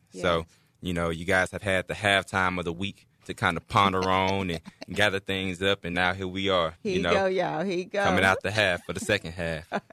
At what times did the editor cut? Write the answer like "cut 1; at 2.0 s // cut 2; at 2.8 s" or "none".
cut 1; at 3.1 s // cut 2; at 6.8 s